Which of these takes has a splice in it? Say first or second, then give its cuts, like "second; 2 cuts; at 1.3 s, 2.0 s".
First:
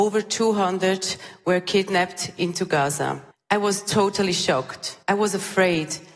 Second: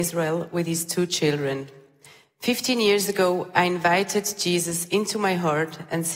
first; 2 cuts; at 3.3 s, 5.0 s